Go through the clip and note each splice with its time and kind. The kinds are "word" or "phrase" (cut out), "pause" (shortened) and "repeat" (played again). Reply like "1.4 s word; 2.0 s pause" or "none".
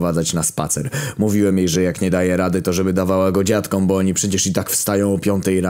none